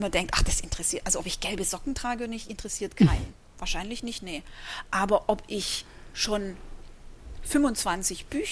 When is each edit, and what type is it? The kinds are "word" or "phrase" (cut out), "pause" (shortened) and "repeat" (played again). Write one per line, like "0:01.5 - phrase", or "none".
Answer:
none